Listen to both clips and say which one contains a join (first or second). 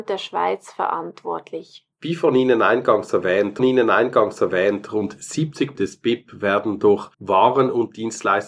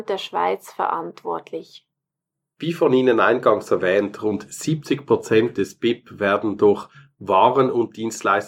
first